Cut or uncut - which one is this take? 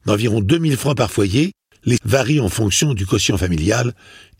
cut